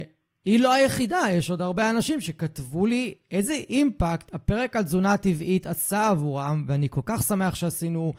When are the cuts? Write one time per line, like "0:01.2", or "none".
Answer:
none

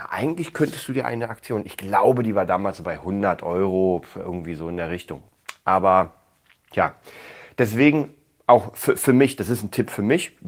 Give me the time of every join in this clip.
none

